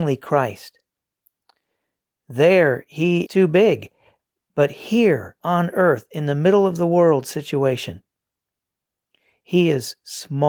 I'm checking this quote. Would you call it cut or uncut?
cut